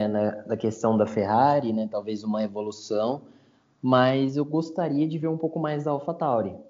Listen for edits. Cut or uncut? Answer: uncut